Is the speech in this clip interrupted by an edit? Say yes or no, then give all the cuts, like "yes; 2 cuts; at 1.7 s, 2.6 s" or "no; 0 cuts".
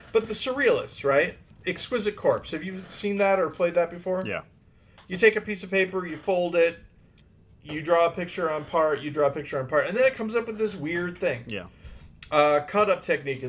no; 0 cuts